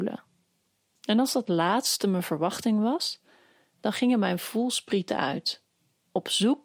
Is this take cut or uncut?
uncut